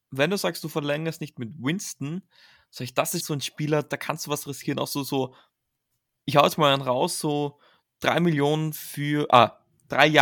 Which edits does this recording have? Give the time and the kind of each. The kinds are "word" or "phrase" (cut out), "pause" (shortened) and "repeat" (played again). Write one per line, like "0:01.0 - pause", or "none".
0:03.2 - word